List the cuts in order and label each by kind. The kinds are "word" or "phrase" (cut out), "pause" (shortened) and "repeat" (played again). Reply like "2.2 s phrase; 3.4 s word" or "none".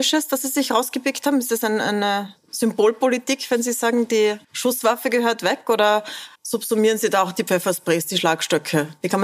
4.4 s pause; 6.4 s pause